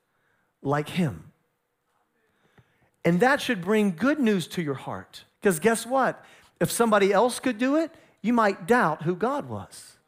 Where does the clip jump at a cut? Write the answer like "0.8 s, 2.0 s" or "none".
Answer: 5.3 s